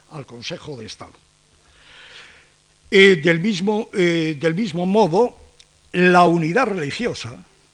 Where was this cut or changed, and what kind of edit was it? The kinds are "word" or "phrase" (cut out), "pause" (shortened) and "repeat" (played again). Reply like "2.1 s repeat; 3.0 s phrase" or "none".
none